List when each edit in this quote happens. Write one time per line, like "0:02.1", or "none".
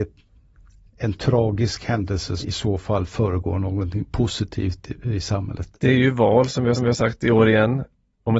0:02.4
0:05.7
0:06.8